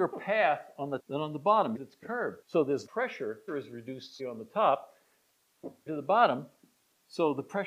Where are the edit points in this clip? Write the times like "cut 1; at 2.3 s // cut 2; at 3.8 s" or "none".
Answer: cut 1; at 1.0 s // cut 2; at 1.8 s // cut 3; at 2.4 s // cut 4; at 2.9 s // cut 5; at 3.5 s // cut 6; at 4.2 s // cut 7; at 5.9 s

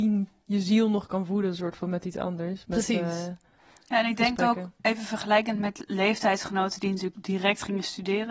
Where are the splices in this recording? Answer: none

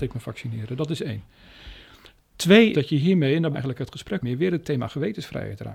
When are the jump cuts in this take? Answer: cut 1; at 2.7 s // cut 2; at 3.5 s // cut 3; at 4.2 s

